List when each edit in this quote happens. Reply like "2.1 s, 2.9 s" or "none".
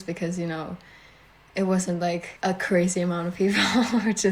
2.4 s